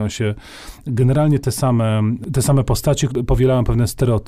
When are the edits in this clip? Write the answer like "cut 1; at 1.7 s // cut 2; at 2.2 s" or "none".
cut 1; at 3.1 s